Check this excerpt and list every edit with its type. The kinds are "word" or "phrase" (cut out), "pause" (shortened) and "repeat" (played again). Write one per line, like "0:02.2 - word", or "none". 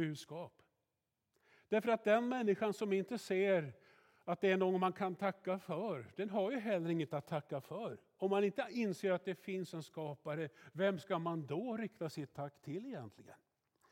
none